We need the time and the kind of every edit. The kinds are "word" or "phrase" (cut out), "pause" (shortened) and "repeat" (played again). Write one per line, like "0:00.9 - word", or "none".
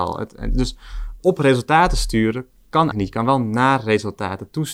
0:01.2 - word
0:02.9 - word